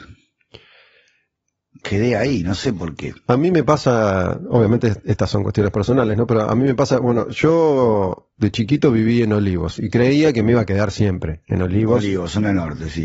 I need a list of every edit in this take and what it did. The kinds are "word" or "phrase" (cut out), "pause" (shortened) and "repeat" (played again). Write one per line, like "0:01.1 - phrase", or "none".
0:08.3 - pause